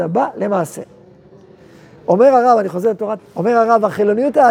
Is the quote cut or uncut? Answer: cut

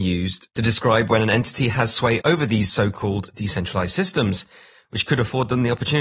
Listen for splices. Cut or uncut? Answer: uncut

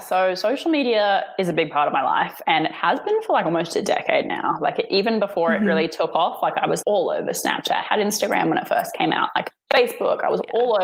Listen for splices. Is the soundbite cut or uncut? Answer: cut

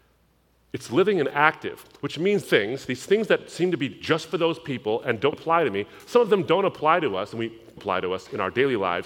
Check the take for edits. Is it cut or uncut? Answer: cut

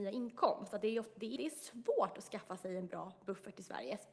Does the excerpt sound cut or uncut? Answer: cut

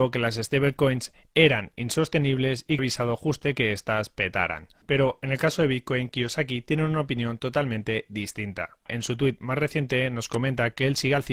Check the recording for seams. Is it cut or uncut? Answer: cut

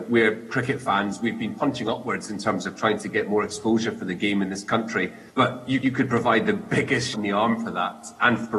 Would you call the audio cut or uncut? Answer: cut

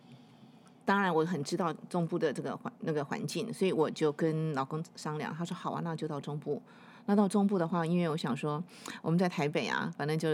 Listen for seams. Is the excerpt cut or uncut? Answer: uncut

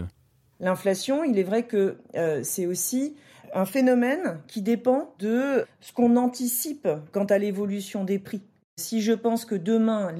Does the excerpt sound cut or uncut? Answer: uncut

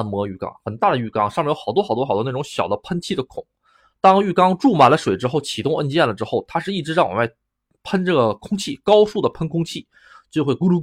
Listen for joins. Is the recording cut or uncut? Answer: uncut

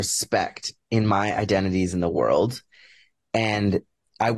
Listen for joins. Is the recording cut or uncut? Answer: uncut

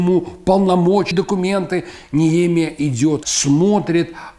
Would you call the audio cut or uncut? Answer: cut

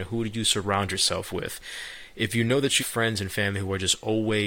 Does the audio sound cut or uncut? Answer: cut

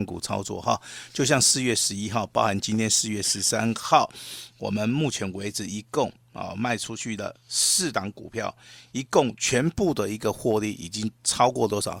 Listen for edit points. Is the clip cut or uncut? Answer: uncut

